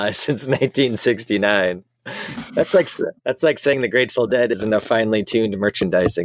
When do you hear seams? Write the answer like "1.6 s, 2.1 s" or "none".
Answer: 3.2 s